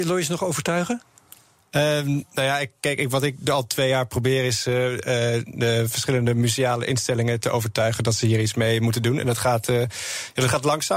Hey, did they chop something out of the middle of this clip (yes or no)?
no